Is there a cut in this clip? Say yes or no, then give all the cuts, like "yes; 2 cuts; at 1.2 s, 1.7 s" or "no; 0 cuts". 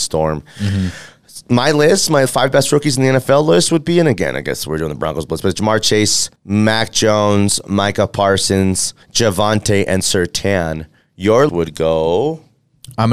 yes; 6 cuts; at 2.3 s, 5.4 s, 6.4 s, 9.0 s, 10.0 s, 11.5 s